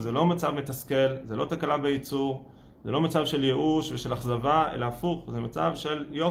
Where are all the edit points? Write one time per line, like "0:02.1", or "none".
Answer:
none